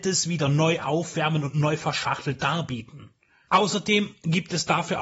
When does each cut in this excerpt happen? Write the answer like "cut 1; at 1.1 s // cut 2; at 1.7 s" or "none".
none